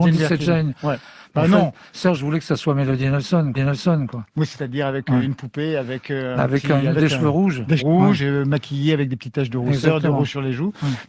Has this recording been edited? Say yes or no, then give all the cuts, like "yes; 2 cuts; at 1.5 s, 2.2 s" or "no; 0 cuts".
yes; 2 cuts; at 3.5 s, 7.8 s